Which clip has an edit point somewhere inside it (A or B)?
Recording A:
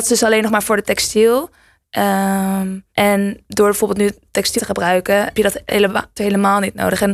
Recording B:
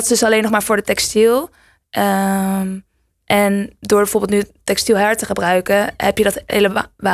A